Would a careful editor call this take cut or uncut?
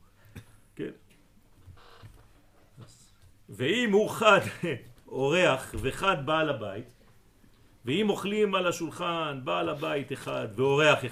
uncut